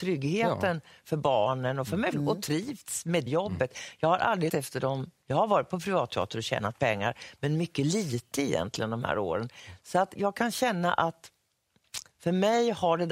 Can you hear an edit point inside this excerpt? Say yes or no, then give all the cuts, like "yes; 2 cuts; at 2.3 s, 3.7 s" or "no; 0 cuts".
yes; 6 cuts; at 2.1 s, 3.3 s, 4.5 s, 5.2 s, 10.2 s, 12.1 s